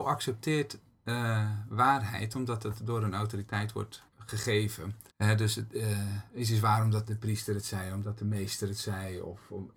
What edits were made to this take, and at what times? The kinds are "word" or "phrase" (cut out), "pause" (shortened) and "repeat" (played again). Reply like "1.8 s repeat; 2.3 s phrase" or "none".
4.1 s word; 5.1 s pause; 7.1 s word